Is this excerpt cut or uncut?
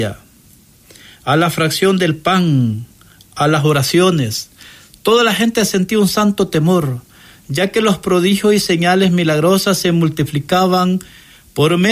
uncut